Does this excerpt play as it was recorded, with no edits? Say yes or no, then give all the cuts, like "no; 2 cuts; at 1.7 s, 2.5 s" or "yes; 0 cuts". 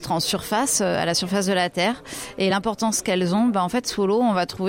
yes; 0 cuts